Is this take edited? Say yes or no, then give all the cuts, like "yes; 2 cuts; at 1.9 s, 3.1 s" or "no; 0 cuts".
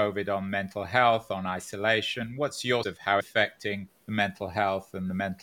yes; 3 cuts; at 2.8 s, 3.2 s, 3.9 s